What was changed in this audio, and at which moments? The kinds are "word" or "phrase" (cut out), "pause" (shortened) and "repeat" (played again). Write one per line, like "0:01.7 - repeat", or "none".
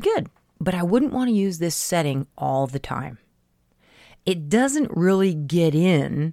none